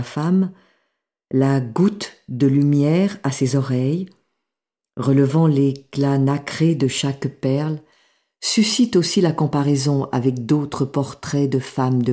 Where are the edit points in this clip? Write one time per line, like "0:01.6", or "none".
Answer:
none

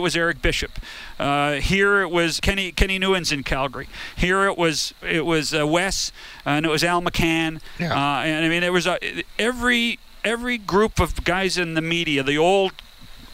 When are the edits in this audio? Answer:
0:02.4

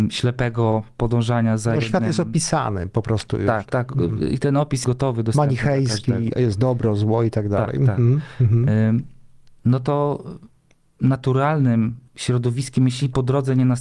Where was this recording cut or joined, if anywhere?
0:03.7
0:04.8
0:12.1

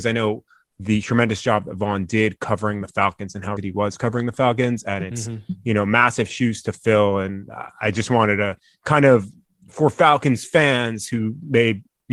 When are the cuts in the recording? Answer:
0:03.6

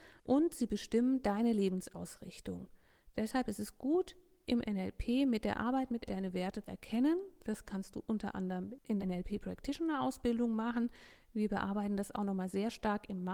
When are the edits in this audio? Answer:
0:06.1
0:06.6
0:09.0

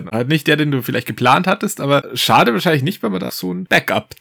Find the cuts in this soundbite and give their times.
0:03.3

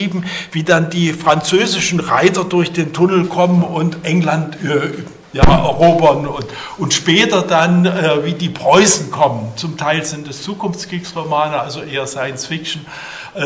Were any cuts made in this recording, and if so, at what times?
none

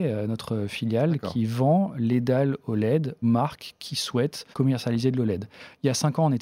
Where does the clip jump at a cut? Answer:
0:03.2
0:04.5

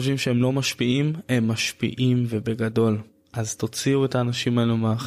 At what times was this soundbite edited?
none

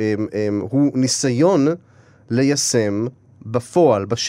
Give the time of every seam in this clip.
0:03.4

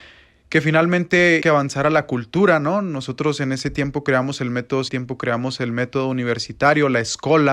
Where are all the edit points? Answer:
0:01.4
0:04.9

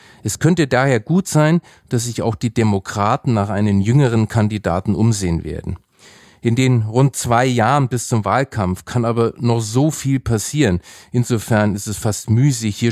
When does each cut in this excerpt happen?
none

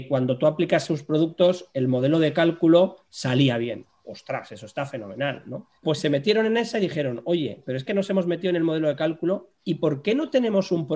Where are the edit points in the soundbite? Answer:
0:05.8
0:07.9
0:09.5

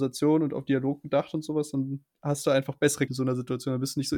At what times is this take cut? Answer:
0:02.1
0:03.1

